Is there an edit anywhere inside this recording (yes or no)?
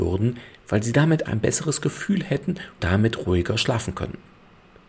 yes